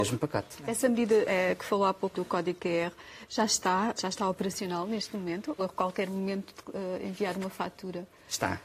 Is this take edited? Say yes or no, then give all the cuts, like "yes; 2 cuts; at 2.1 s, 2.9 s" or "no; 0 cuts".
yes; 3 cuts; at 2.1 s, 4.0 s, 5.6 s